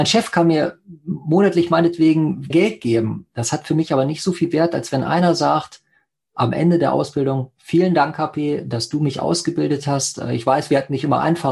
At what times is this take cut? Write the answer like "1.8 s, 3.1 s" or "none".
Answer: 2.5 s